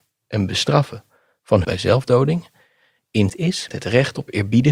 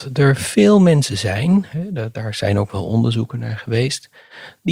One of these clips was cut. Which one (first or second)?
first